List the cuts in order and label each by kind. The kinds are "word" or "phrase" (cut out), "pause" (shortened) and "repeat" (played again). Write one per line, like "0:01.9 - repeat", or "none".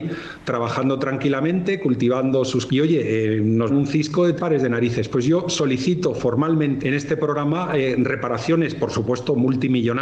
0:02.7 - phrase
0:03.7 - word
0:04.4 - word
0:06.8 - word